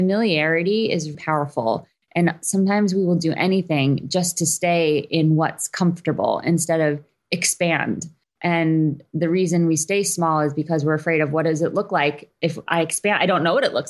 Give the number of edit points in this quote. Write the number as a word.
one